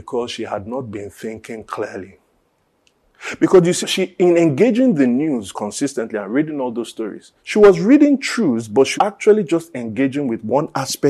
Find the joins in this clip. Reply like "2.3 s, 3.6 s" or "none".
3.8 s, 5.5 s, 7.4 s, 9.0 s